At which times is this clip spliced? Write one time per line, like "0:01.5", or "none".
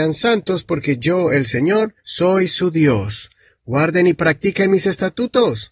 0:02.0